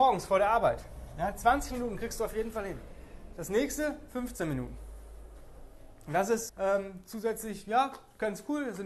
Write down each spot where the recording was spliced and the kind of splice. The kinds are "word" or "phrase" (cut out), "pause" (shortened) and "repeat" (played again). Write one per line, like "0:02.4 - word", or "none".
0:06.5 - word